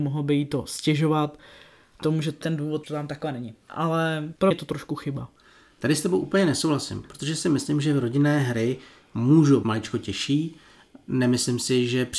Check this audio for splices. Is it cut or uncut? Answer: cut